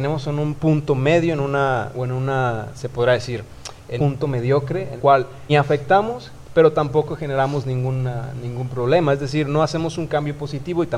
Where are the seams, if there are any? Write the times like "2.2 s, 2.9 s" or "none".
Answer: 1.9 s, 4.0 s, 5.0 s, 5.5 s